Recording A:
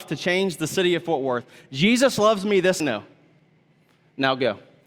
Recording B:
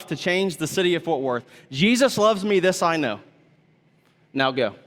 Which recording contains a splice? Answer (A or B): A